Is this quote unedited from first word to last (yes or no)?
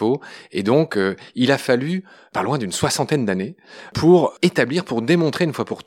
yes